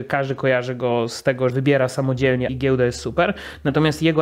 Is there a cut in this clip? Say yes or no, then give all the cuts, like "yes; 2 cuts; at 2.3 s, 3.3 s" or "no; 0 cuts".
yes; 2 cuts; at 1.5 s, 2.5 s